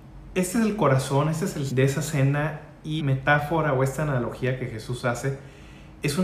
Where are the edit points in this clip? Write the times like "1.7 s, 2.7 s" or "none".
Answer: 1.7 s, 3.0 s